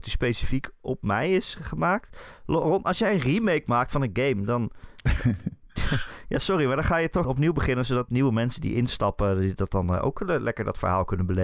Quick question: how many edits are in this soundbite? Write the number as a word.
one